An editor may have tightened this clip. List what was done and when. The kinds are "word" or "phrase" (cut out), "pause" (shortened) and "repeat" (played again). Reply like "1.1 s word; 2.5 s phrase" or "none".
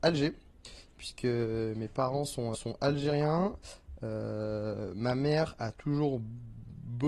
2.5 s word